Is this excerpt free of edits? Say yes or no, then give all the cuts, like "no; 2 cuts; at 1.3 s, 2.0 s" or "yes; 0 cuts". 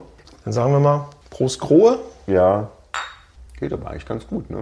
yes; 0 cuts